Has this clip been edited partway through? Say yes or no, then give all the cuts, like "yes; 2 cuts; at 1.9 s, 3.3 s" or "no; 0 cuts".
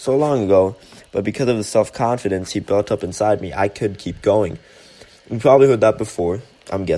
yes; 1 cut; at 5.2 s